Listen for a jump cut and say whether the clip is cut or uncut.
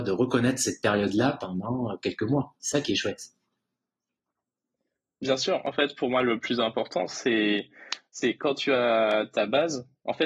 uncut